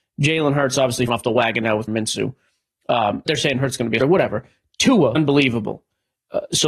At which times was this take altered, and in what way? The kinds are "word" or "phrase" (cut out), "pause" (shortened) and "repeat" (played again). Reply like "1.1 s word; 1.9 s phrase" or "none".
1.1 s word; 1.9 s word; 3.3 s word; 4.0 s word; 5.1 s word